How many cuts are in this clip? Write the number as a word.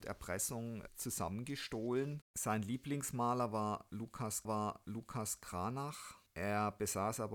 one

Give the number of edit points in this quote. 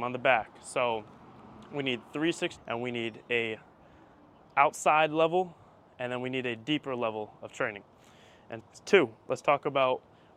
two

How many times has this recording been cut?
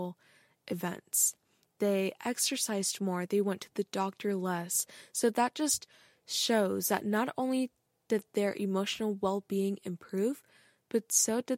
zero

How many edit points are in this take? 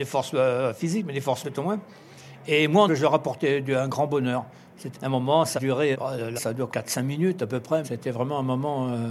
eight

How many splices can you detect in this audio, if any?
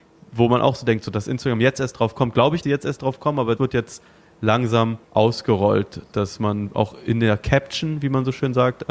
three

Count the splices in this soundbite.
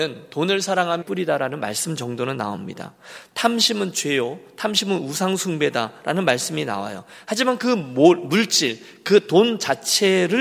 one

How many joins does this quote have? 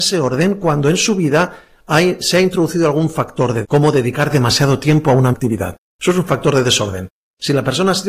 two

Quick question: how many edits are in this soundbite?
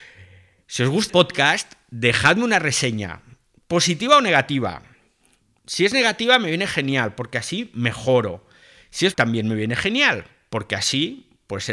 two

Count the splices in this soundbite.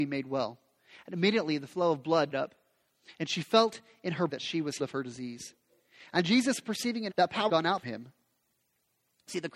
six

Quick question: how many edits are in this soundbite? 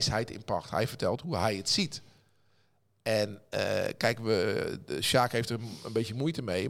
zero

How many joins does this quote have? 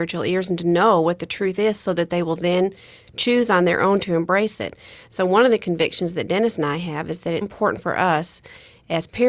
one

